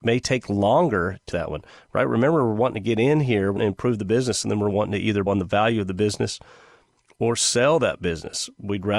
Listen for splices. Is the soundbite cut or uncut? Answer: cut